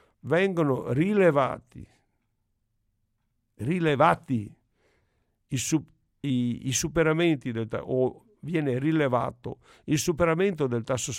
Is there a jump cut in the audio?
no; 0 cuts

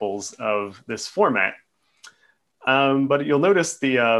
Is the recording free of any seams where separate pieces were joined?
yes; 0 cuts

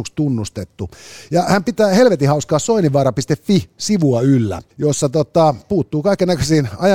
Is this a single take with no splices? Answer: no; 1 cut; at 4.7 s

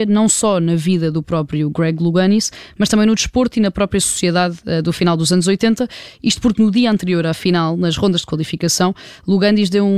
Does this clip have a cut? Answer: no; 0 cuts

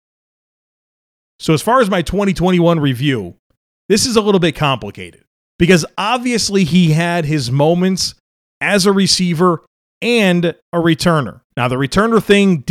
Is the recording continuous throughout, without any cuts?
no; 2 cuts; at 5.4 s, 11.5 s

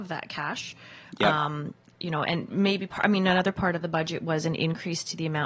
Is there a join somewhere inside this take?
no; 0 cuts

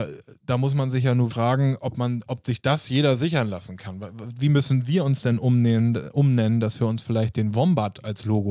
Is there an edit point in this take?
yes; 1 cut; at 1.3 s

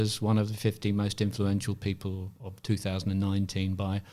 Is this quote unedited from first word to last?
yes; 0 cuts

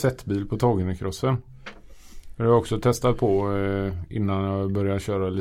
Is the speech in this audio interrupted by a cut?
no; 0 cuts

